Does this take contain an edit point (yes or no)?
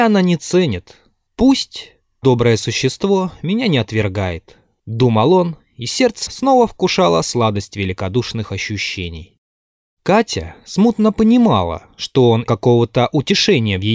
yes